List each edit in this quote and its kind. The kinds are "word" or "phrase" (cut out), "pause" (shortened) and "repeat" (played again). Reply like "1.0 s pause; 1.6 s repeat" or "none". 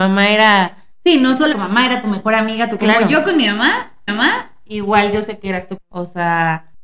1.5 s word; 2.8 s phrase; 4.1 s repeat